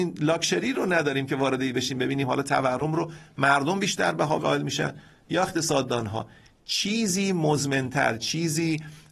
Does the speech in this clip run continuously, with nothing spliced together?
no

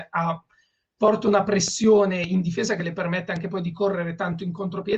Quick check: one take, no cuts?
yes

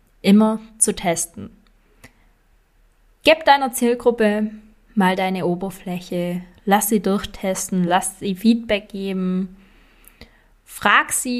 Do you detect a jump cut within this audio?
no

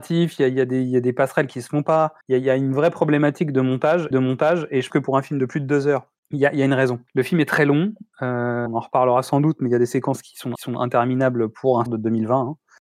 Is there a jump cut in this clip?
yes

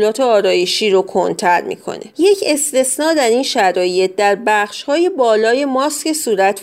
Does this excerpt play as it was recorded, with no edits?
yes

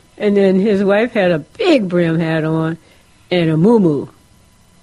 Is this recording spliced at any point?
no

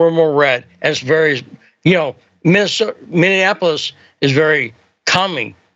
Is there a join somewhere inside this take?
no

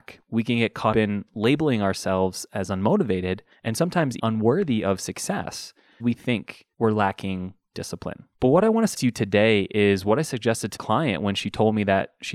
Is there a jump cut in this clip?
yes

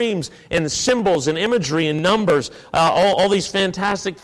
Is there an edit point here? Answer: no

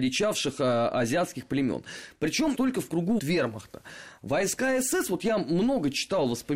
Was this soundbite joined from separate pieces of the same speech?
yes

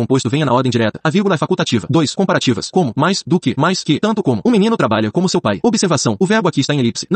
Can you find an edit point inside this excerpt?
no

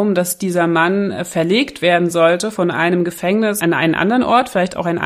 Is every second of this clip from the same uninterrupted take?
yes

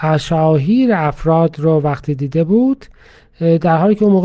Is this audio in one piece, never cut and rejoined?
yes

